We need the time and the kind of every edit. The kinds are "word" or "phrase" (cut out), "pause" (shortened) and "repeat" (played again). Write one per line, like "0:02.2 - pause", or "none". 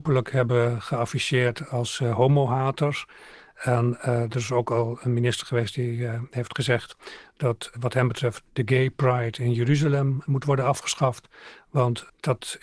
none